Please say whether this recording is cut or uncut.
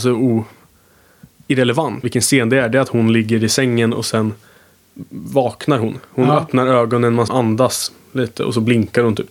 cut